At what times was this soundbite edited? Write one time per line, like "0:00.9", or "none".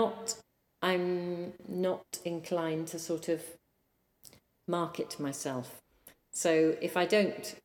none